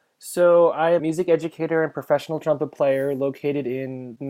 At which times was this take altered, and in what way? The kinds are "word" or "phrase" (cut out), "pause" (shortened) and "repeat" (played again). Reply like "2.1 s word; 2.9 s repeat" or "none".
1.0 s word